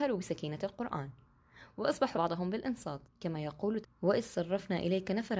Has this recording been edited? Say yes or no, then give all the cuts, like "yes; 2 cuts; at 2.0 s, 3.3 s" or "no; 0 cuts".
yes; 3 cuts; at 2.1 s, 3.0 s, 3.8 s